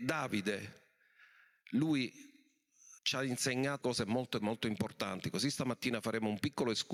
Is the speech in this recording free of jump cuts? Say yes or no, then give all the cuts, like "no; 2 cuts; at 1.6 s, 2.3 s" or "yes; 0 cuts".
no; 3 cuts; at 3.0 s, 3.8 s, 4.4 s